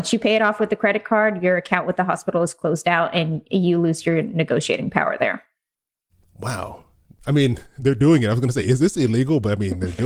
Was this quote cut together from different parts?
no; 0 cuts

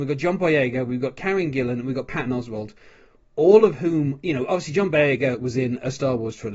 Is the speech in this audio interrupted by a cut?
no; 0 cuts

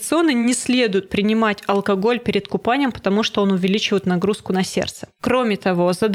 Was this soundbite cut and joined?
no; 0 cuts

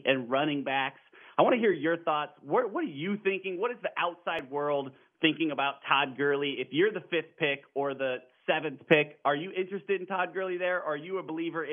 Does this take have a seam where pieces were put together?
no; 0 cuts

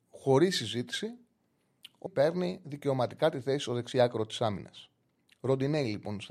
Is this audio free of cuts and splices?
no; 1 cut; at 2.1 s

